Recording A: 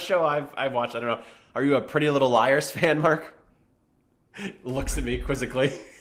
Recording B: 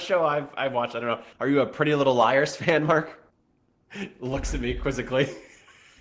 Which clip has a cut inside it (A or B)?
B